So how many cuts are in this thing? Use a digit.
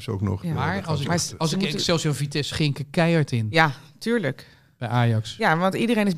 1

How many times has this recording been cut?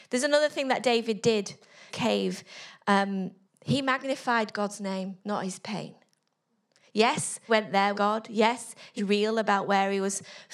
6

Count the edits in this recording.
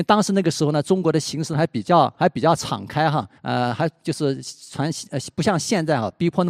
1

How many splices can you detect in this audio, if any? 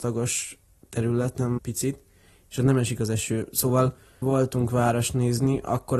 2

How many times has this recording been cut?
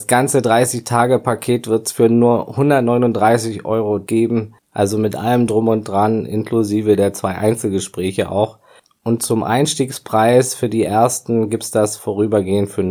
0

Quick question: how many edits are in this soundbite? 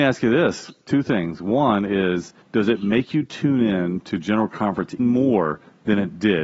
2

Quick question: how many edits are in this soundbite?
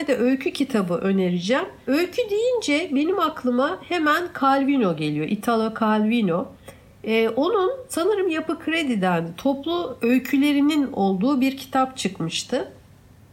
0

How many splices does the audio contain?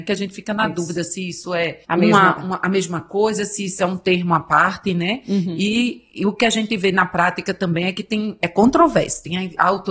2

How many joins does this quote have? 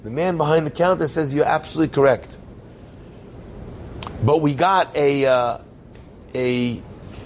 0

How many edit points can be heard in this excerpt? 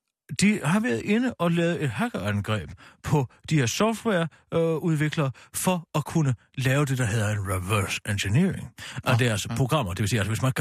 0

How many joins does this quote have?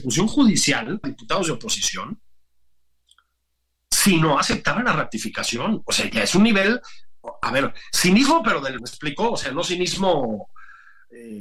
2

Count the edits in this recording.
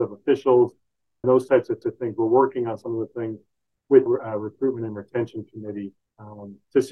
4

